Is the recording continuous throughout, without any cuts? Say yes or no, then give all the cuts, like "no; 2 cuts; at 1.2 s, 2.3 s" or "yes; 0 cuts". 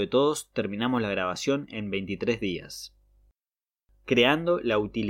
yes; 0 cuts